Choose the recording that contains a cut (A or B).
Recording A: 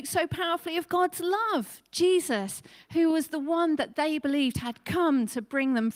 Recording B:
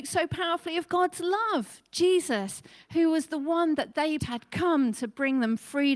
B